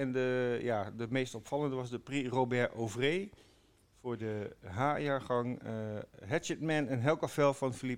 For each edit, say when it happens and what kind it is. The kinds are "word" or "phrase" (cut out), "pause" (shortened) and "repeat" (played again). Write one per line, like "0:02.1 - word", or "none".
none